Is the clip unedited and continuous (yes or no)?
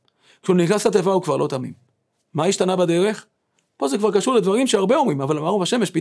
yes